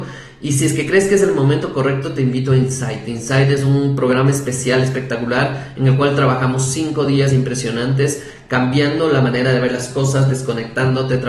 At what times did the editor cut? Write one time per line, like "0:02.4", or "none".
none